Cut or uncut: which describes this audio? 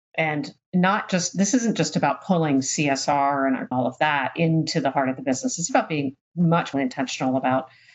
cut